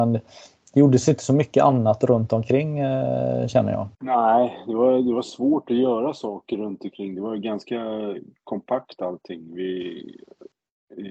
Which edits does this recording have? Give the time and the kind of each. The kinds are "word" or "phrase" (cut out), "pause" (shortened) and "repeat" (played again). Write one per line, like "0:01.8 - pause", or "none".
0:03.9 - pause